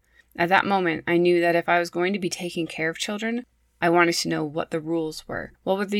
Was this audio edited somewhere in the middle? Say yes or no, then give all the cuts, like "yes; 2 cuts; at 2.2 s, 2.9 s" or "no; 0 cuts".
no; 0 cuts